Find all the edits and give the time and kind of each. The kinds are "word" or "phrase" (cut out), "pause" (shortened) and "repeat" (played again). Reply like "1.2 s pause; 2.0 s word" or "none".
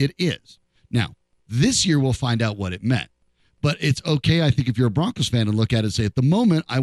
none